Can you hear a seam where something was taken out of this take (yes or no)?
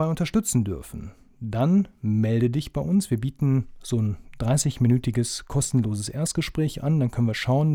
no